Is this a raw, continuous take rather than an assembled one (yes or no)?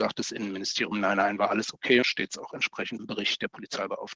no